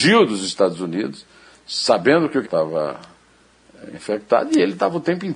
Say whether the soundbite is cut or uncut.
cut